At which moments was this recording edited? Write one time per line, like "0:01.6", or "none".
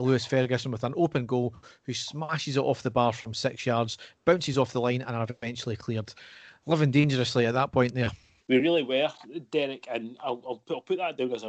none

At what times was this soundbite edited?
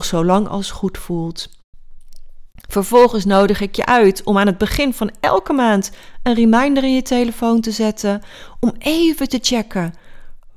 none

